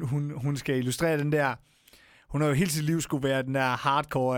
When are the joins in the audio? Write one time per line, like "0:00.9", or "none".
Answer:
none

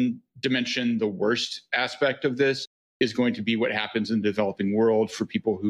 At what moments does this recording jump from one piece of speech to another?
none

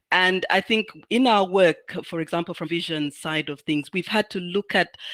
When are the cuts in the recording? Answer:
0:02.6

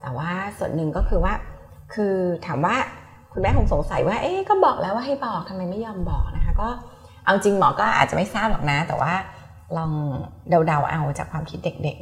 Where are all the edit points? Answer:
none

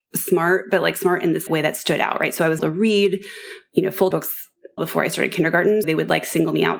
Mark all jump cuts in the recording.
0:01.5
0:02.6
0:04.1
0:04.8
0:05.8

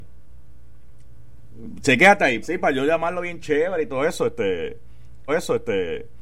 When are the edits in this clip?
0:02.4
0:05.3

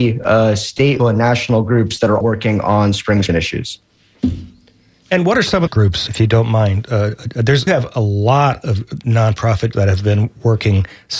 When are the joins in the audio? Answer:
0:01.0
0:02.2
0:03.3
0:05.7
0:06.1
0:07.7
0:09.7

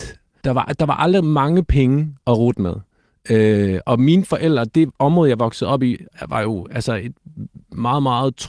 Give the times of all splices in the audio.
0:02.2

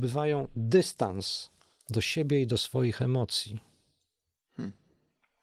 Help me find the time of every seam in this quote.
none

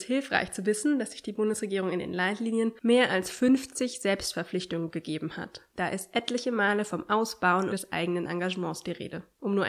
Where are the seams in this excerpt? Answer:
0:07.7

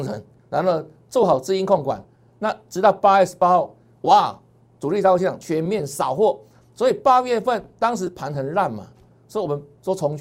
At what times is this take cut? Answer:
none

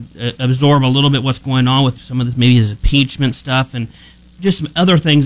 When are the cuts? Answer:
none

